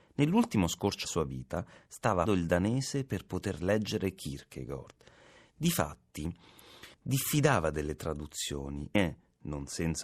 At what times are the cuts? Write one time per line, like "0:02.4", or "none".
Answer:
0:01.0
0:02.3
0:06.9

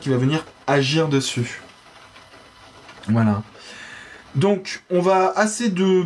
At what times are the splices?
0:04.2

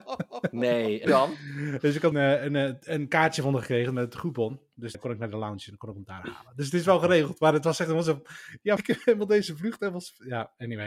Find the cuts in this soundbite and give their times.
0:01.0
0:02.1
0:04.9
0:08.8

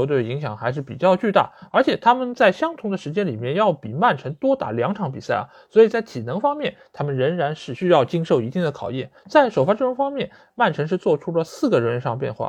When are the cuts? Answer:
0:09.2

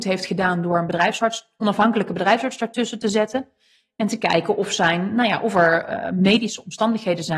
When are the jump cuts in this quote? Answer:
none

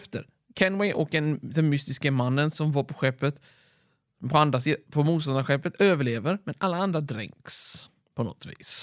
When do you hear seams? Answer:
none

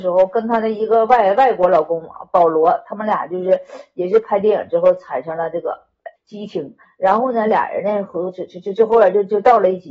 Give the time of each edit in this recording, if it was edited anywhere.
0:06.2

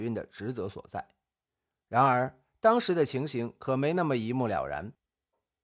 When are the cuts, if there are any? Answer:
none

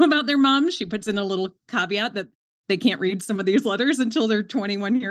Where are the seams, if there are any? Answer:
none

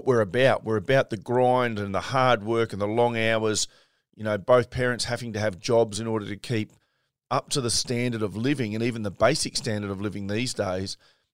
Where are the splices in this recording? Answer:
none

